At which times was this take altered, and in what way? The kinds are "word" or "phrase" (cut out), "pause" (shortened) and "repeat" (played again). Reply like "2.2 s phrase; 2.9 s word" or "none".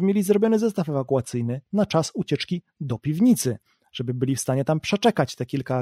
none